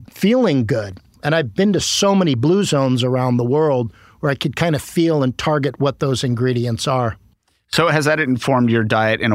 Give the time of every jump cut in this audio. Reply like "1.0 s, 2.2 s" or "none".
none